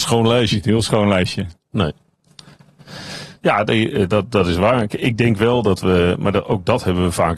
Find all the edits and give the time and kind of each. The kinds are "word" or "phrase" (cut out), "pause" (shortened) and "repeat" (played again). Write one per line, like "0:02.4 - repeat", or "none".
0:03.4 - pause